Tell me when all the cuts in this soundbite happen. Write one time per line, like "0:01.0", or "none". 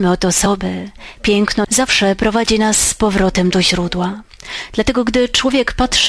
0:01.6